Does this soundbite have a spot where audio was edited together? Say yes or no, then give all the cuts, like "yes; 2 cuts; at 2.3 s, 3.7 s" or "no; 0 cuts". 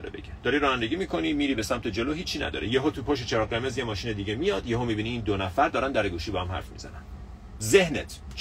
no; 0 cuts